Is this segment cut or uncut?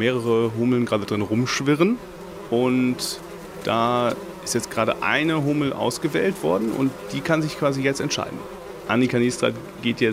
uncut